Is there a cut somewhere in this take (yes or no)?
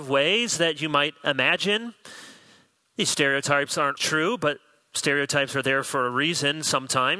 yes